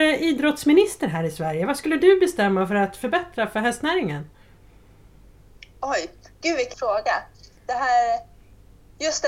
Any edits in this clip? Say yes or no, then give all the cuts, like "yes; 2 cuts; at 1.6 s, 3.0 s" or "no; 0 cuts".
yes; 1 cut; at 6.7 s